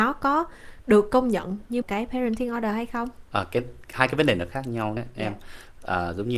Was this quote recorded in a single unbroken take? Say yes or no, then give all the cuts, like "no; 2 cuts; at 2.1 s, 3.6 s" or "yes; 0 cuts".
no; 2 cuts; at 1.8 s, 5.0 s